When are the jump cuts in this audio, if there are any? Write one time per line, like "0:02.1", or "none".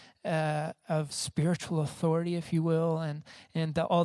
0:01.1